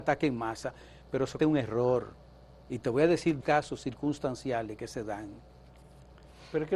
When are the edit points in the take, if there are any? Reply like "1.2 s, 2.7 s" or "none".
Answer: 1.4 s, 2.4 s, 3.4 s